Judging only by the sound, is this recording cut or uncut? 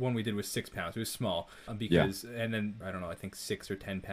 cut